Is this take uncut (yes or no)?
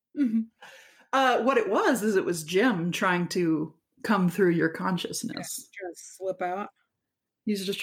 yes